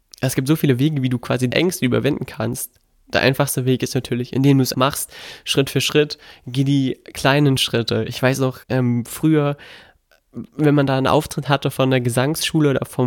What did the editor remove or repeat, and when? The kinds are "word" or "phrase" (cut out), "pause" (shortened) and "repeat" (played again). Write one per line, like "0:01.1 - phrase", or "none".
0:01.5 - word
0:04.7 - word
0:08.6 - pause